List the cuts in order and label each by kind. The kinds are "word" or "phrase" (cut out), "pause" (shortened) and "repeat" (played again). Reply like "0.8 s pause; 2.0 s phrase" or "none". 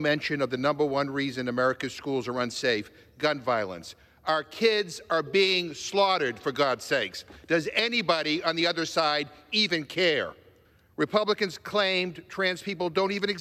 none